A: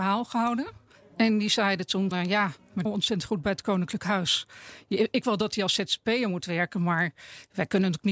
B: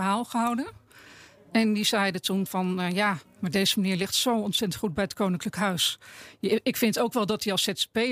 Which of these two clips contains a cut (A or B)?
A